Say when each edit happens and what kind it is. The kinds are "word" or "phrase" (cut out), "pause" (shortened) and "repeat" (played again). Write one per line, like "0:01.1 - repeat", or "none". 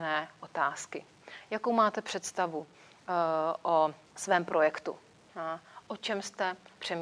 0:04.0 - pause

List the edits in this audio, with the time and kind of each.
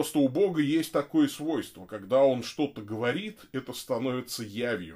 none

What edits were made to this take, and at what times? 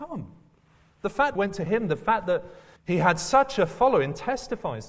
0:01.4 - phrase
0:01.7 - word
0:02.8 - pause

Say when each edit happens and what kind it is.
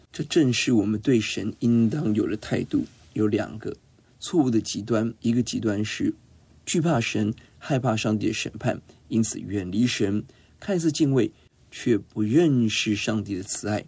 0:05.2 - pause

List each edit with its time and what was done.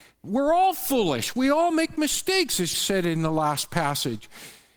0:02.7 - word

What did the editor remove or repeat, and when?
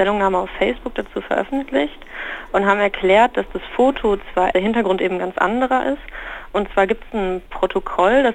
0:04.5 - phrase

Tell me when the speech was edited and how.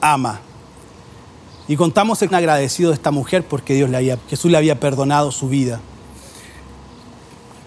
0:02.3 - word
0:04.2 - word

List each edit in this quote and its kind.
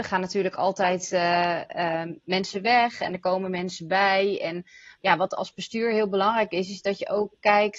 none

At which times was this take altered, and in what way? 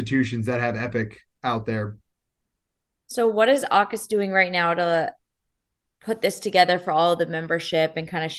none

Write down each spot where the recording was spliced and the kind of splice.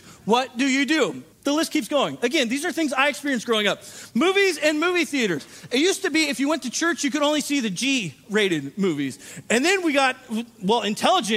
0:01.3 - pause

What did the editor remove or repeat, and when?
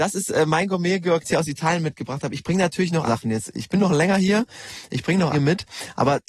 0:01.2 - phrase
0:03.0 - word
0:05.3 - phrase

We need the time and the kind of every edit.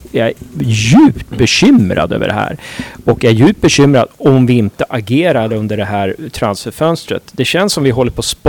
none

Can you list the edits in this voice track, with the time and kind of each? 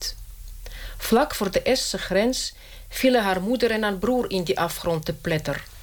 none

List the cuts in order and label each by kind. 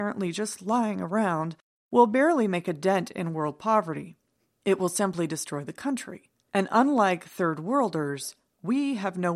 none

